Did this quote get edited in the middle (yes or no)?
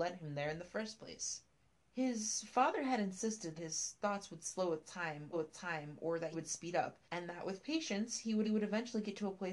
yes